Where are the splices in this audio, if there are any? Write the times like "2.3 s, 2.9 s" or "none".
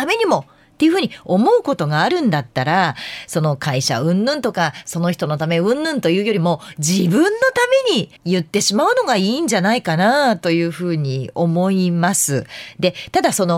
8.2 s